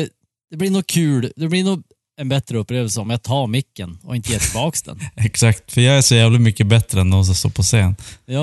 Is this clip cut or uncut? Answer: uncut